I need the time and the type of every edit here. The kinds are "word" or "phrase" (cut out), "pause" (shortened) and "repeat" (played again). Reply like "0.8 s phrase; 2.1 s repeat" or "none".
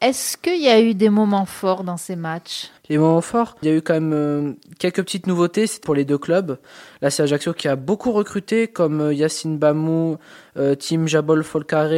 2.8 s pause; 3.6 s phrase; 5.8 s phrase